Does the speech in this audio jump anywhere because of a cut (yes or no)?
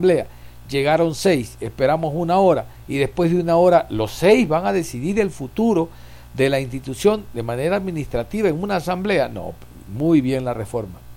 no